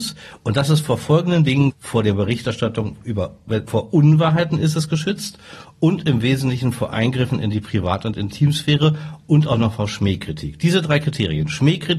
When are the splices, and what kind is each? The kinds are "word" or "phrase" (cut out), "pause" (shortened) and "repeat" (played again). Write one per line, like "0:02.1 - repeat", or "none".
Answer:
0:01.7 - word